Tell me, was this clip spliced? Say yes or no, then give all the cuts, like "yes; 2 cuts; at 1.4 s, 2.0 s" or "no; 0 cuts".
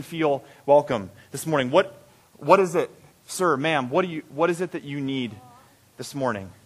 no; 0 cuts